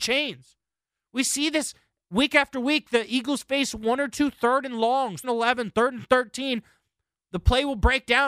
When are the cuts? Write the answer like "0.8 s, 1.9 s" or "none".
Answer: 5.2 s